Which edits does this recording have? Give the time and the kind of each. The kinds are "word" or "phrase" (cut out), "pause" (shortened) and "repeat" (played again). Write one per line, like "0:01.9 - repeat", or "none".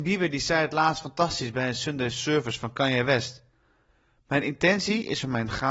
none